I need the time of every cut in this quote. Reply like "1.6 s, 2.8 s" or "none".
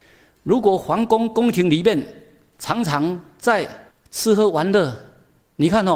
3.9 s